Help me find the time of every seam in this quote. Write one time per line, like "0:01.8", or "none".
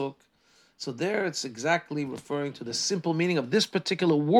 none